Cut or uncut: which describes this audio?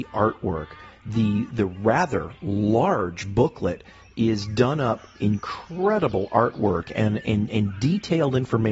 uncut